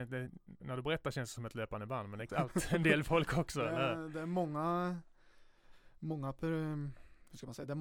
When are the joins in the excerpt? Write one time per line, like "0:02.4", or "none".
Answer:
0:02.3